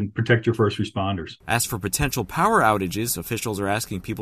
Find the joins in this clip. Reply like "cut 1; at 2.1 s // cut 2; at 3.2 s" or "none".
none